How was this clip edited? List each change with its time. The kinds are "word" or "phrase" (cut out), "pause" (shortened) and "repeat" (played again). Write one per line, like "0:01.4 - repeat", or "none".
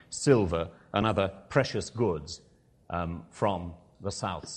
none